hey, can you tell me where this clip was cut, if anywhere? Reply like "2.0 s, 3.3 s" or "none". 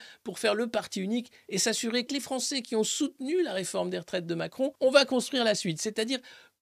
2.1 s, 4.7 s